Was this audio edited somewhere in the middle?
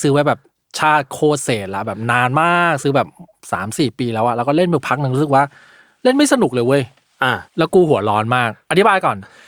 yes; 1 cut; at 7.5 s

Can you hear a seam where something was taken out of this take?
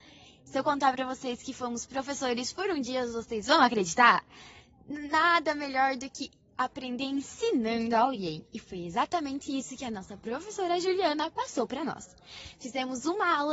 no; 0 cuts

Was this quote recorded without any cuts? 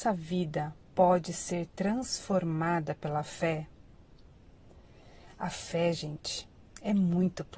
yes; 0 cuts

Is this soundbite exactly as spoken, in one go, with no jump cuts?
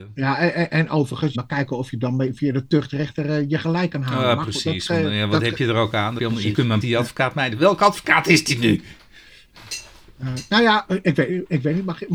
no; 3 cuts; at 1.3 s, 6.2 s, 6.8 s

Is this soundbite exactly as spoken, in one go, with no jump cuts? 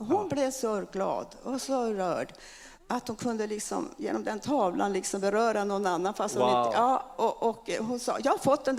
yes; 0 cuts

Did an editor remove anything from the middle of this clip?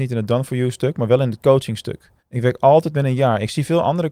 yes; 1 cut; at 2.2 s

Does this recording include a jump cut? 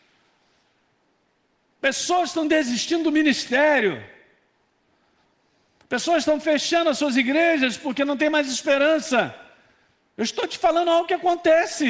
no; 0 cuts

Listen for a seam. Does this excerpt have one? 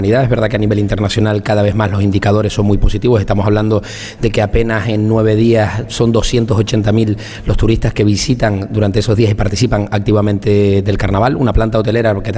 no; 0 cuts

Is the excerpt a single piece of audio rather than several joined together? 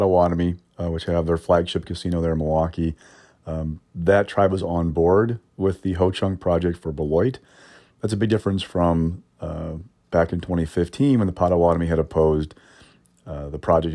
yes; 0 cuts

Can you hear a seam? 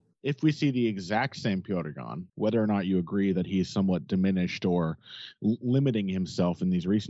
yes; 1 cut; at 2.3 s

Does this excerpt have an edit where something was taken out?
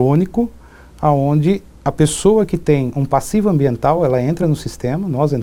no; 0 cuts

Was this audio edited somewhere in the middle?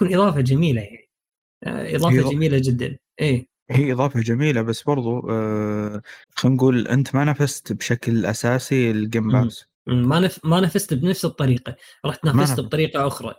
yes; 3 cuts; at 3.6 s, 6.2 s, 9.7 s

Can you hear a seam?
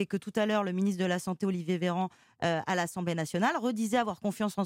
no; 0 cuts

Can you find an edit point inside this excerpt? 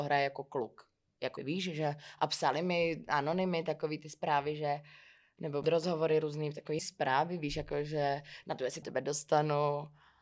yes; 4 cuts; at 1.4 s, 5.6 s, 6.8 s, 8.8 s

